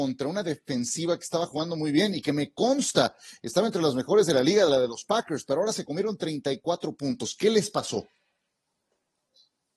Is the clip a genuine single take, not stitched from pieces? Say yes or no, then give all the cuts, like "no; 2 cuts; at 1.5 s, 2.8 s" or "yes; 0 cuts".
yes; 0 cuts